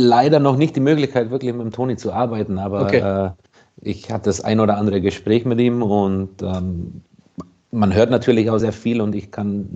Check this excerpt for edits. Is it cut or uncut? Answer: cut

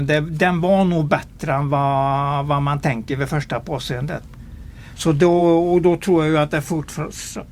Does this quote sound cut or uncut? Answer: uncut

